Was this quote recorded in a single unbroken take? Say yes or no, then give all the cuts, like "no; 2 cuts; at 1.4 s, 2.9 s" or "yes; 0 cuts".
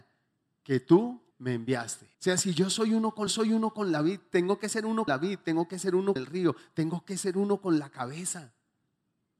no; 5 cuts; at 1.3 s, 2.1 s, 3.3 s, 5.1 s, 6.2 s